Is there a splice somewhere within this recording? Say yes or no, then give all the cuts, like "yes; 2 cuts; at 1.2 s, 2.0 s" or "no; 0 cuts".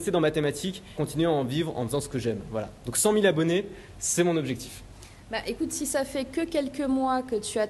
yes; 1 cut; at 1.0 s